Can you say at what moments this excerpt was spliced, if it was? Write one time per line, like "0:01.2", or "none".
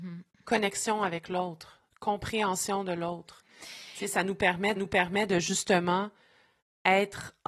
0:04.8

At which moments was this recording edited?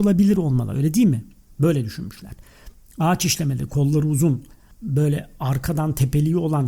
none

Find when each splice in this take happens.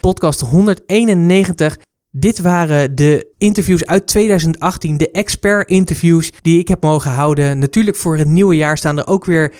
0:03.3
0:06.4

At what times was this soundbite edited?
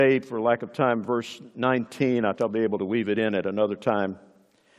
0:02.3

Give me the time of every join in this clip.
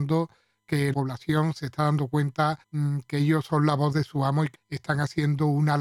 0:00.9
0:02.6
0:04.5

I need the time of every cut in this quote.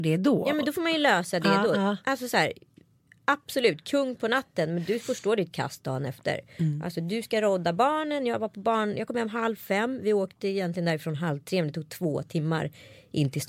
none

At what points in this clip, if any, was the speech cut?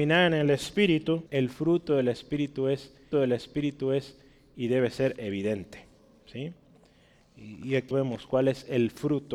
0:01.3
0:03.1
0:07.9

